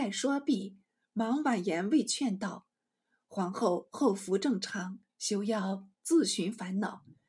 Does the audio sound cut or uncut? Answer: cut